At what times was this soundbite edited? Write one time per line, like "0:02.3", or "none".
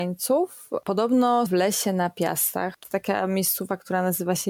0:01.5
0:02.8